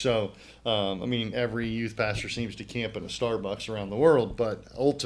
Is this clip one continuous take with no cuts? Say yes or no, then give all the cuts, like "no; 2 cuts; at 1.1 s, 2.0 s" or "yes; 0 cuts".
yes; 0 cuts